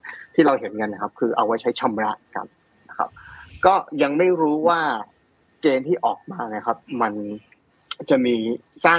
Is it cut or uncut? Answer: uncut